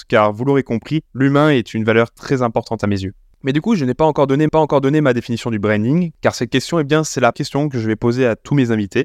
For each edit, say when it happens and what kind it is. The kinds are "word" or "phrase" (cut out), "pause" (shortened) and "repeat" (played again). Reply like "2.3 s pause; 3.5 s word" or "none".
1.1 s pause; 3.3 s pause; 4.5 s repeat; 7.3 s word